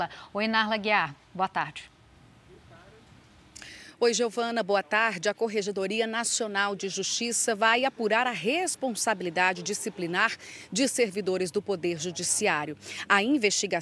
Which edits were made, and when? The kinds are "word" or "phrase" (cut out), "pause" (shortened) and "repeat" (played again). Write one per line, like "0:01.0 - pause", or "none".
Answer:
none